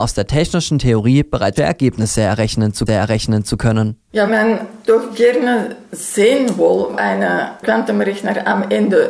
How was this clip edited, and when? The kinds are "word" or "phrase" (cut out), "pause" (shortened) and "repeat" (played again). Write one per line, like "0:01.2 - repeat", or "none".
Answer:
0:01.6 - word
0:02.9 - repeat
0:04.3 - word
0:04.9 - word
0:06.9 - phrase